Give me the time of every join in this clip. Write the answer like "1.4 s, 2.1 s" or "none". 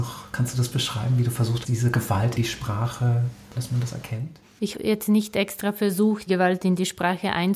1.6 s, 2.4 s, 3.6 s, 4.7 s, 6.3 s